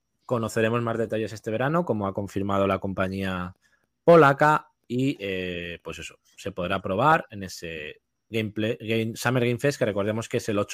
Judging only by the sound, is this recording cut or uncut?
uncut